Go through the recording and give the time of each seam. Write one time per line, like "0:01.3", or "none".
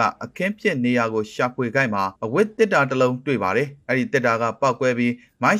0:02.2

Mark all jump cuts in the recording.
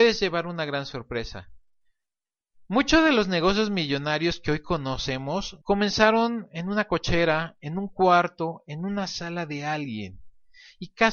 0:05.6

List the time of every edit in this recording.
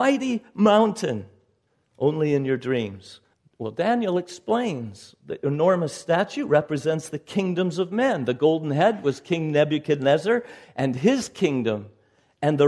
0:01.7
0:03.3

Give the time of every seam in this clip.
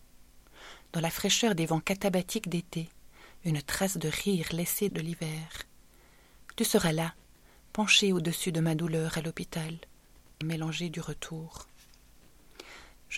0:04.9
0:10.4

